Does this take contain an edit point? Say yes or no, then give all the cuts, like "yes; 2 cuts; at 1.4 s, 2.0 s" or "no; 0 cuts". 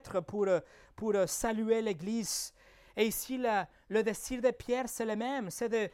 no; 0 cuts